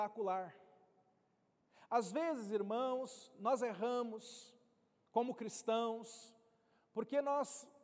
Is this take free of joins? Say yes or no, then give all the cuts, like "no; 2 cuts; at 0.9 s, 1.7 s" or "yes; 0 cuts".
yes; 0 cuts